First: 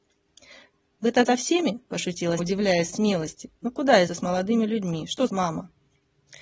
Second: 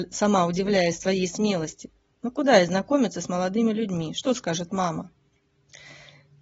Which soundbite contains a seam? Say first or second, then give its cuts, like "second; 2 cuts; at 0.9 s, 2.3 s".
first; 6 cuts; at 1.2 s, 2.4 s, 2.9 s, 3.6 s, 4.1 s, 5.3 s